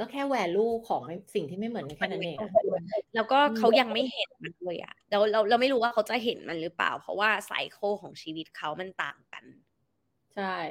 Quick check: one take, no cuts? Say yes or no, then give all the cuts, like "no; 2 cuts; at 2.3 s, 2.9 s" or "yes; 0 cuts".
no; 1 cut; at 3.1 s